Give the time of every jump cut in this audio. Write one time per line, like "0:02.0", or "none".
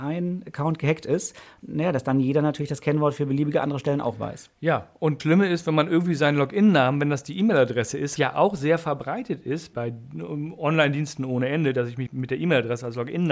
0:05.2
0:08.2
0:09.7
0:12.1